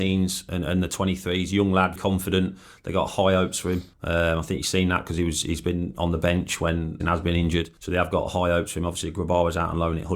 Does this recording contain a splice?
yes; 4 cuts; at 2.0 s, 3.9 s, 7.0 s, 7.8 s

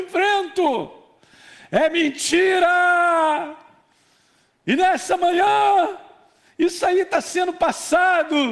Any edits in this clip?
no; 0 cuts

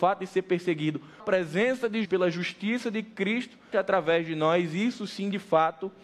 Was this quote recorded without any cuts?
no; 3 cuts; at 1.2 s, 2.0 s, 3.7 s

